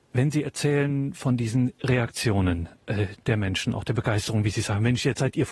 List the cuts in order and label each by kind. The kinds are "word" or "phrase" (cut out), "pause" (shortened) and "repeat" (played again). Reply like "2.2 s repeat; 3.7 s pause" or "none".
none